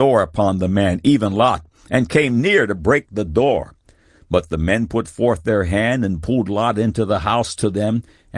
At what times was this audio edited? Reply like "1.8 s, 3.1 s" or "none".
none